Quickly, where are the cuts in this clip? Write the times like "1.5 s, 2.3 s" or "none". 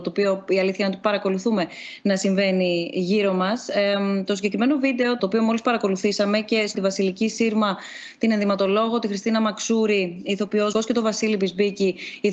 5.2 s, 6.7 s, 10.7 s